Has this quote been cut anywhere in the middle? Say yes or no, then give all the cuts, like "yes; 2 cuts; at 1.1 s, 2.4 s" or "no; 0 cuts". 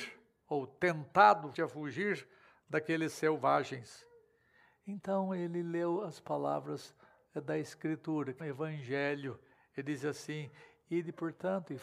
yes; 2 cuts; at 1.5 s, 8.4 s